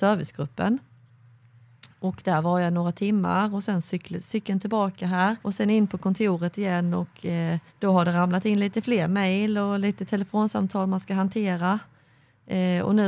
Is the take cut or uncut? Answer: cut